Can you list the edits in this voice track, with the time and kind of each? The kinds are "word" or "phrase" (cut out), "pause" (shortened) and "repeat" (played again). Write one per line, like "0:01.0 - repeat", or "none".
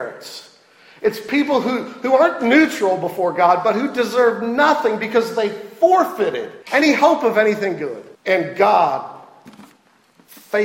0:06.6 - pause
0:08.1 - pause